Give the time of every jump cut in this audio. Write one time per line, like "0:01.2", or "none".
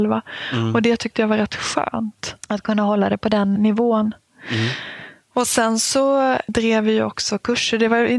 0:02.4
0:03.6